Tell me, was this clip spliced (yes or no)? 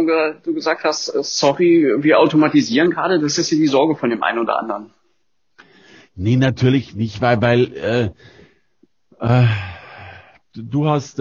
no